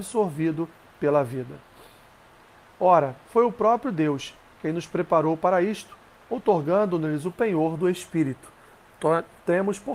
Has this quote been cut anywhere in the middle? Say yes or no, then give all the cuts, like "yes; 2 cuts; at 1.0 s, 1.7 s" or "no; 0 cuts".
no; 0 cuts